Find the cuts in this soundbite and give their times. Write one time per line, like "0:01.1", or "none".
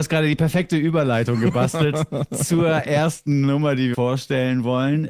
0:03.9

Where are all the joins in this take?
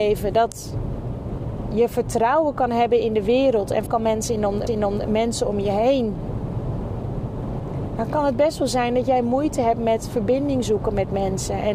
0:03.9
0:04.7

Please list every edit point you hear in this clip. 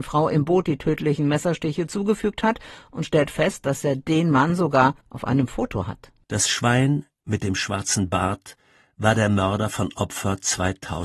0:05.0

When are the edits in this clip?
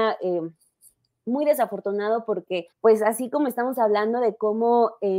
0:02.7

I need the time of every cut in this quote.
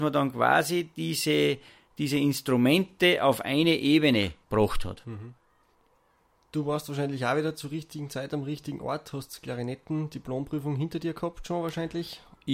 0:04.4
0:05.7

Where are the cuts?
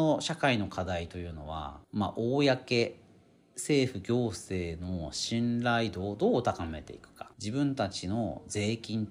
0:01.8
0:07.3

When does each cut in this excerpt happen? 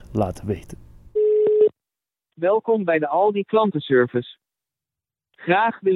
none

